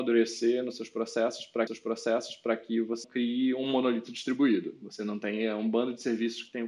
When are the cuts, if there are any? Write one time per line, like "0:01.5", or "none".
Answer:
0:01.7
0:03.0